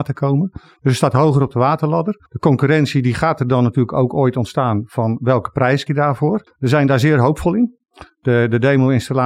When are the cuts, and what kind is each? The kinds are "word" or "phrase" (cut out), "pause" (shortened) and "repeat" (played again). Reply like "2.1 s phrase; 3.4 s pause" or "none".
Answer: 2.3 s pause; 5.9 s word; 6.5 s pause

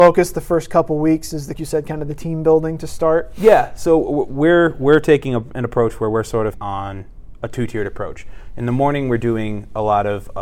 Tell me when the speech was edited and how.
1.5 s phrase; 6.5 s word

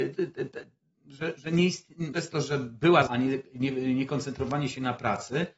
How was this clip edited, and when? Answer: 2.1 s word; 3.1 s word

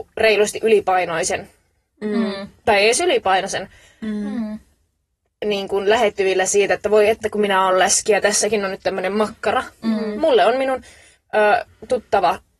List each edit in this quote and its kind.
none

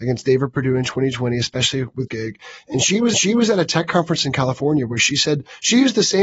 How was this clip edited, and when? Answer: 2.1 s word; 3.1 s repeat

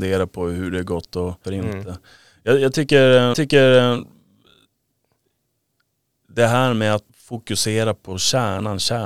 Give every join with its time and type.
1.4 s phrase; 3.3 s repeat; 7.1 s word

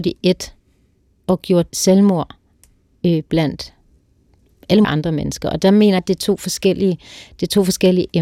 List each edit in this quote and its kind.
1.7 s word; 4.8 s word; 6.0 s word

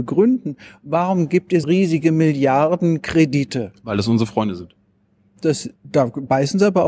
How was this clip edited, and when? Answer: 1.6 s word; 5.8 s pause

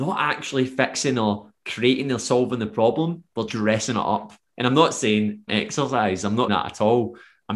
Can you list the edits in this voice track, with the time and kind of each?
3.5 s word; 5.5 s word; 6.5 s word

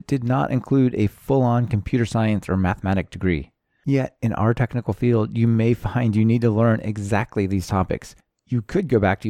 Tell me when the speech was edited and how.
none

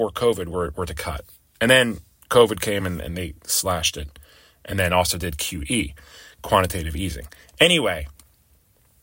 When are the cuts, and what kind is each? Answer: none

